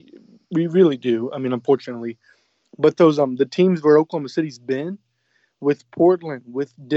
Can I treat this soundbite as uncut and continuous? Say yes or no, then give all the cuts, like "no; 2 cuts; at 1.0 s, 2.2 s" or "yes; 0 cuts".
yes; 0 cuts